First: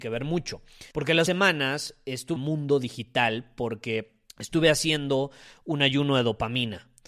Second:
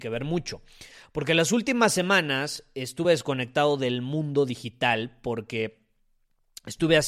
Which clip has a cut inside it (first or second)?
first